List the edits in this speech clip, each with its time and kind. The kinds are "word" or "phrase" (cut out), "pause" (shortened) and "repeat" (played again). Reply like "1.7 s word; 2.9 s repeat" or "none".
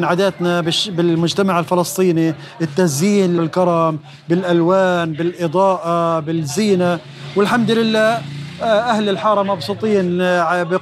3.4 s word

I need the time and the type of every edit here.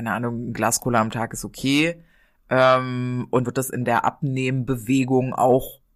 3.4 s word

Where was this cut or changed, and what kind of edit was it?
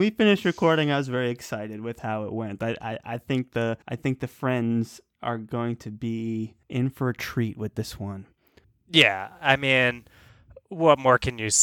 3.8 s pause; 6.6 s pause; 8.6 s pause

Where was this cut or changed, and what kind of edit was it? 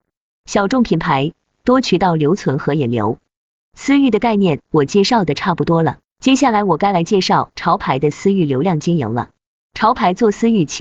none

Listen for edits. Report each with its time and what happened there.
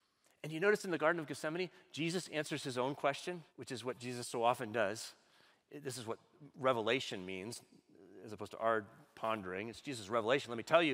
3.5 s pause

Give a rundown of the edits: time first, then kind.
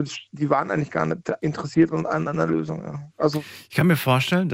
1.4 s word

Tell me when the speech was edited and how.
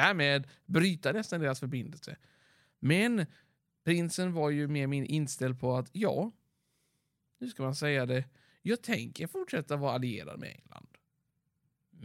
none

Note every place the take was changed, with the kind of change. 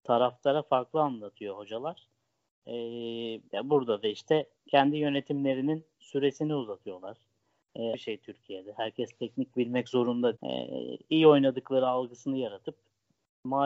3.4 s pause; 4.6 s pause; 7.9 s phrase; 10.4 s word

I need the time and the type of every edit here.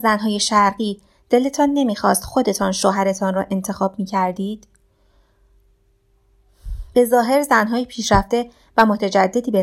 none

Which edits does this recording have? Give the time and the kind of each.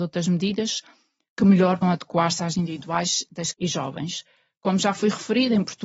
1.8 s word; 2.5 s word; 3.5 s word

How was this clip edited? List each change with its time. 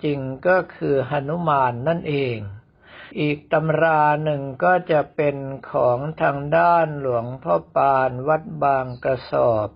3.1 s pause

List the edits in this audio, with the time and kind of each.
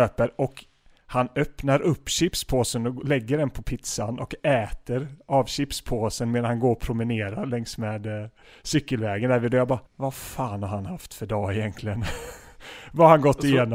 9.9 s pause

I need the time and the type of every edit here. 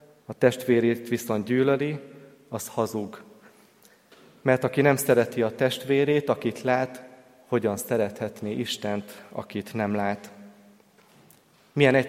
none

